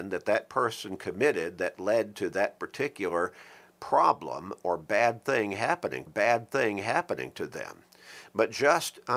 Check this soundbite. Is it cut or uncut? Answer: cut